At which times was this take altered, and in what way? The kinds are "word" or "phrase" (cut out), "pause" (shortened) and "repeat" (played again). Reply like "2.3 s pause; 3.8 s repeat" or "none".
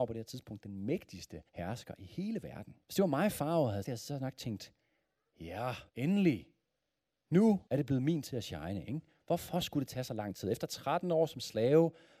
1.5 s pause; 2.8 s pause; 3.8 s word; 5.9 s pause; 7.7 s pause; 8.2 s word